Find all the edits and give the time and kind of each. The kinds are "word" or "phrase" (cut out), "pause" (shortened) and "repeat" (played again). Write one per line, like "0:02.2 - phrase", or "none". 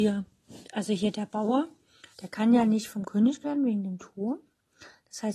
0:02.1 - pause
0:03.4 - word

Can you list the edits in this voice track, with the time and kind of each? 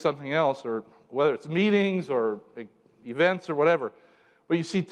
none

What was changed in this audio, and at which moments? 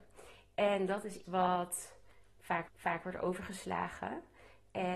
0:01.2 - word
0:02.7 - repeat

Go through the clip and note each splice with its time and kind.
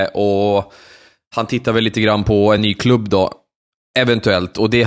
none

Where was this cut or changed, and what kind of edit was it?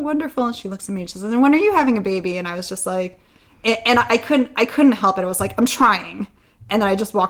none

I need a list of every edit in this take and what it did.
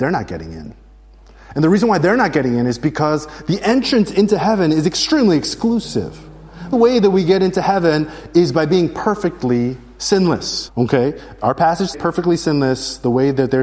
0:06.7 - word
0:11.9 - word

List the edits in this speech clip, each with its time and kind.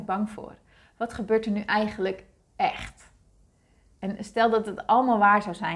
none

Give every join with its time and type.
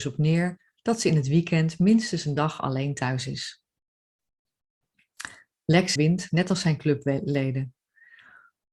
0:06.0 - phrase

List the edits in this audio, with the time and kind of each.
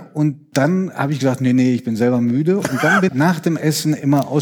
0:03.1 - word

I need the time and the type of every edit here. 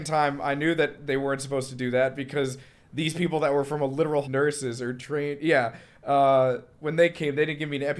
0:04.2 - phrase

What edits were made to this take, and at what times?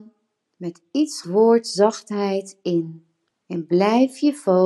0:01.2 - phrase

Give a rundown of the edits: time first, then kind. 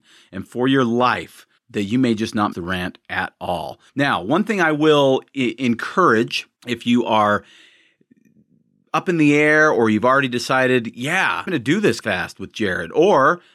0:01.6 - pause
0:02.5 - word
0:03.9 - pause
0:06.6 - pause
0:11.5 - word
0:12.0 - word

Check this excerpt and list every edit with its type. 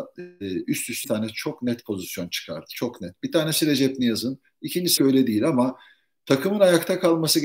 0:01.0 - word
0:05.0 - word

